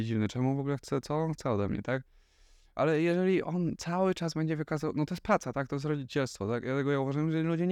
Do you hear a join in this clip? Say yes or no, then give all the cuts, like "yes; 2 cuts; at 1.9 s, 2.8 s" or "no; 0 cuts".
no; 0 cuts